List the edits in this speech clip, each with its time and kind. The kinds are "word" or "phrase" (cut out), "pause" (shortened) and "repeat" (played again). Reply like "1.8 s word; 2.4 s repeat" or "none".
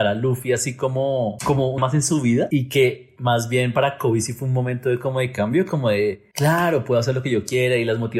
1.8 s word; 6.3 s pause